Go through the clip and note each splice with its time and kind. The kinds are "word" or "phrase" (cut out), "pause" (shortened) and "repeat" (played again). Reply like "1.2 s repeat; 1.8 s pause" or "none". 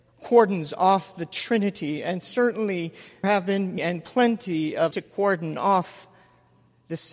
3.2 s word; 3.8 s word; 4.9 s word